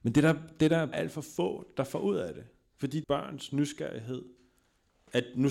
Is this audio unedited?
no; 2 cuts; at 0.9 s, 3.0 s

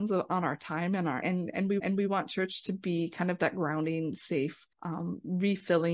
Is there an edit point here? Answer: yes; 3 cuts; at 1.2 s, 1.8 s, 4.7 s

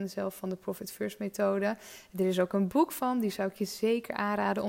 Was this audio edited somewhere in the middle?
no; 0 cuts

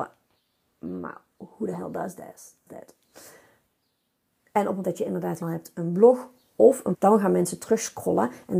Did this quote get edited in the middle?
yes; 4 cuts; at 2.7 s, 4.8 s, 5.4 s, 6.9 s

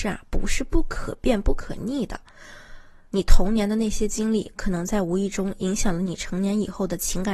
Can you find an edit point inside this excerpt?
no; 0 cuts

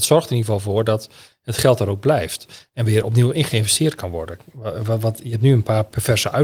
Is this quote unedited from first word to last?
yes; 0 cuts

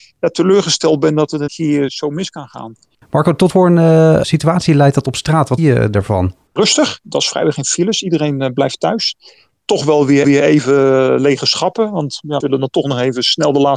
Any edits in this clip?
yes; 7 cuts; at 1.5 s, 2.9 s, 3.5 s, 5.6 s, 6.5 s, 10.2 s, 12.4 s

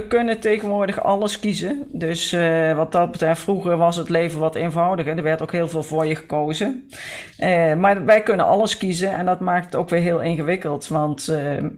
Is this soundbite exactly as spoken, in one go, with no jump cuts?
yes; 0 cuts

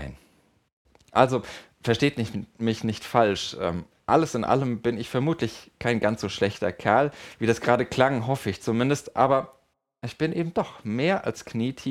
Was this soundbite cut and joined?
no; 0 cuts

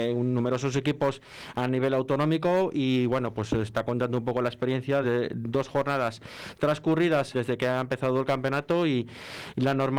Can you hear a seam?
yes; 2 cuts; at 5.0 s, 7.3 s

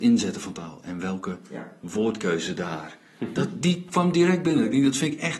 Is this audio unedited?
no; 1 cut; at 3.6 s

